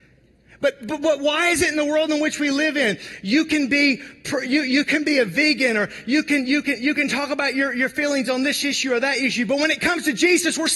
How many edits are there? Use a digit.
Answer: 0